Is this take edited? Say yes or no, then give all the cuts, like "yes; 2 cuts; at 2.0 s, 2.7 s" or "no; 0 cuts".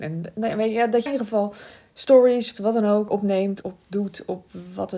yes; 4 cuts; at 1.1 s, 2.5 s, 3.1 s, 3.6 s